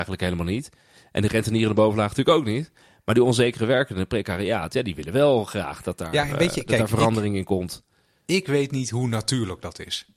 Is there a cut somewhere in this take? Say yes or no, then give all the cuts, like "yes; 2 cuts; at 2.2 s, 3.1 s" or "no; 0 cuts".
no; 0 cuts